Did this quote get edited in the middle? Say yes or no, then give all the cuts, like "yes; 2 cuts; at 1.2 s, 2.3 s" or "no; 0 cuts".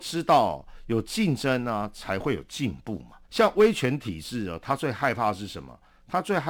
yes; 1 cut; at 3.2 s